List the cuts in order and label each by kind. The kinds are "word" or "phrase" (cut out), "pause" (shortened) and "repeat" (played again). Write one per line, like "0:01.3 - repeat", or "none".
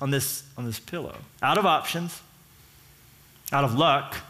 0:01.3 - pause